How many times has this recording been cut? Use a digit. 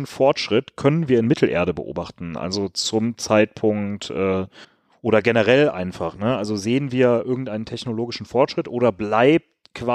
1